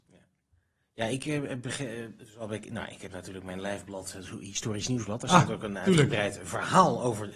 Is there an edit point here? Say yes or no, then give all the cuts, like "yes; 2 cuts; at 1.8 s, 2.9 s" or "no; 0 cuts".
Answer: no; 0 cuts